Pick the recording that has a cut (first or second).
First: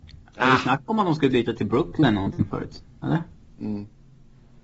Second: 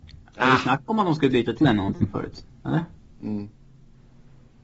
second